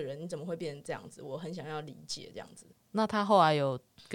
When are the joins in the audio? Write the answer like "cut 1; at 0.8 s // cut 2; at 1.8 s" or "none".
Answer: cut 1; at 2.7 s